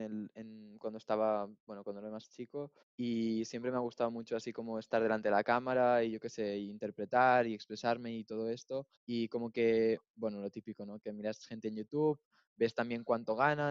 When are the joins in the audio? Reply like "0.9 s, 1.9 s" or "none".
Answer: 2.8 s, 9.0 s